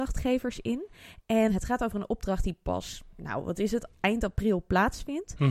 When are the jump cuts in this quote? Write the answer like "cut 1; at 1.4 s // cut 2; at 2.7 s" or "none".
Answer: cut 1; at 1.5 s

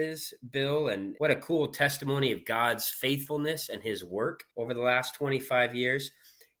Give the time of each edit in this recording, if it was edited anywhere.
cut 1; at 4.5 s

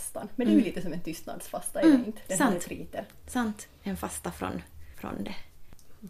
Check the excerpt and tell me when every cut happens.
none

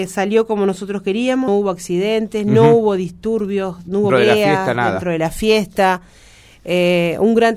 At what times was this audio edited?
cut 1; at 1.5 s // cut 2; at 4.1 s

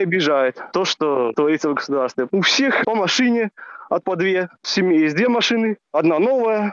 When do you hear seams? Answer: cut 1; at 1.3 s // cut 2; at 2.8 s // cut 3; at 4.0 s // cut 4; at 4.6 s

